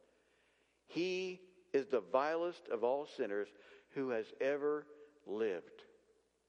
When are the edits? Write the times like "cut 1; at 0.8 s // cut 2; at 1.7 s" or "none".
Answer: none